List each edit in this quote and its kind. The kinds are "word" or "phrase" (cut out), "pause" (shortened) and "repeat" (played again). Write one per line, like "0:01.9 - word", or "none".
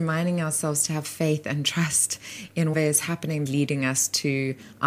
0:02.7 - word
0:03.5 - phrase